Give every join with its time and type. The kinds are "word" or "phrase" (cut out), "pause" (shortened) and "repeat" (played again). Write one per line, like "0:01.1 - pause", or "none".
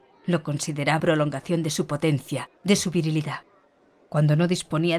0:01.0 - word
0:02.5 - pause